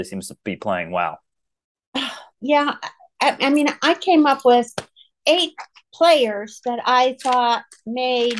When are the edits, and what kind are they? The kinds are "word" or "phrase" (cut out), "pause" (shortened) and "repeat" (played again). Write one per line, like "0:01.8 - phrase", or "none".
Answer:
0:02.3 - pause